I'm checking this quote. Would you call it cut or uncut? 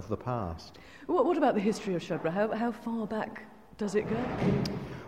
uncut